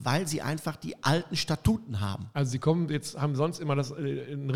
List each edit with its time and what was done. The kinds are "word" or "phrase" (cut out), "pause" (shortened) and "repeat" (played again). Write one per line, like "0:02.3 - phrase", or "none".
none